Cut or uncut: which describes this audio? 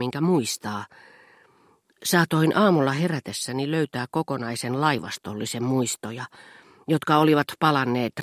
uncut